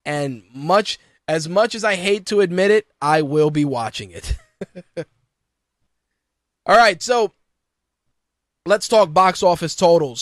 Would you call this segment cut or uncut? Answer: uncut